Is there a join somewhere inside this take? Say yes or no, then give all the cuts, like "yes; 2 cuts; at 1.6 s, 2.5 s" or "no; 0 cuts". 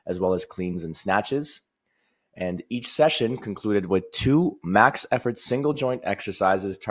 no; 0 cuts